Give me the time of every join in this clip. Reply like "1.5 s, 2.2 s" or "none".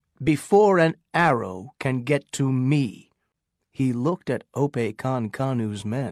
none